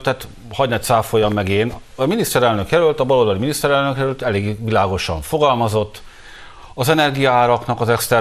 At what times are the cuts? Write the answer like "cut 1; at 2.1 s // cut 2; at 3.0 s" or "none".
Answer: none